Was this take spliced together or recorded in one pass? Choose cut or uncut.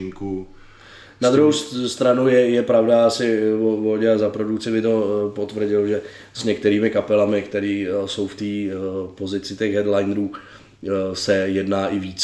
uncut